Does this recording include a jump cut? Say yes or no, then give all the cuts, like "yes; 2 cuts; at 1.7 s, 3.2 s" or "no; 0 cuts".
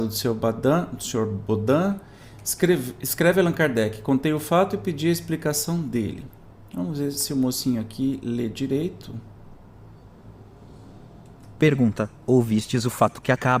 no; 0 cuts